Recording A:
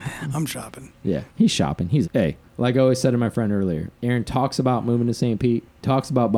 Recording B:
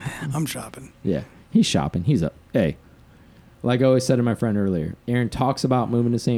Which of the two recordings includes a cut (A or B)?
A